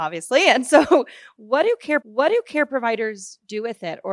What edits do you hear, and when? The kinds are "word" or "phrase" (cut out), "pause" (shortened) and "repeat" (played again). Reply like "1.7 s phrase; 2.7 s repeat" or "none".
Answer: 2.0 s repeat